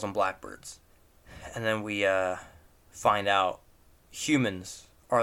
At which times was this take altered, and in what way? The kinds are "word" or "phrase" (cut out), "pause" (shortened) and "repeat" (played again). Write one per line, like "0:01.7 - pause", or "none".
none